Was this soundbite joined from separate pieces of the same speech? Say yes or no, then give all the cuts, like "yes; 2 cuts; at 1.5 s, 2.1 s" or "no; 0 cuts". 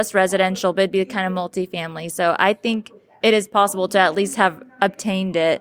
no; 0 cuts